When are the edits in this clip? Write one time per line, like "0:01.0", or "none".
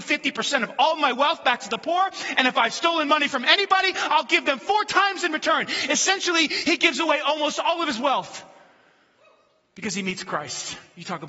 none